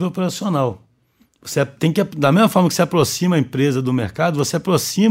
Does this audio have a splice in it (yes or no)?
no